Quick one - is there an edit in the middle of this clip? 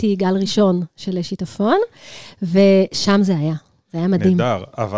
no; 0 cuts

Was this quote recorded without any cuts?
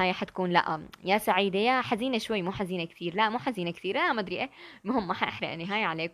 yes; 0 cuts

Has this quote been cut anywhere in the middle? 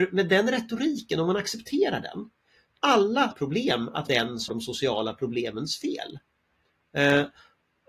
yes; 4 cuts; at 2.8 s, 3.3 s, 4.1 s, 4.5 s

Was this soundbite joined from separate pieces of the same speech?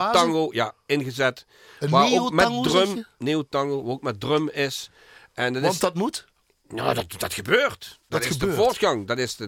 no; 0 cuts

